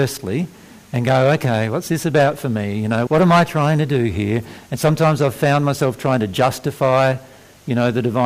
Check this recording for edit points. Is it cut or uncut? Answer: cut